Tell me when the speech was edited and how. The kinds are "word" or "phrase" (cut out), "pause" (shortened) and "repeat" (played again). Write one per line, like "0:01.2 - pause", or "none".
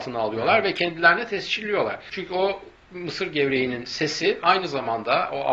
none